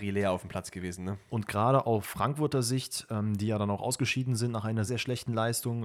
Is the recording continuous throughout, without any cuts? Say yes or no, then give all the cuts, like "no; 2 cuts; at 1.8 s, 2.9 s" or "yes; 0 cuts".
no; 1 cut; at 4.9 s